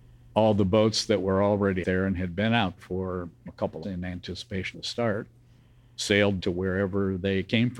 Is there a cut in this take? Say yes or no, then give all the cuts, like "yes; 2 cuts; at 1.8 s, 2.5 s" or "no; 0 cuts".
yes; 6 cuts; at 1.8 s, 2.8 s, 3.5 s, 3.8 s, 4.7 s, 6.4 s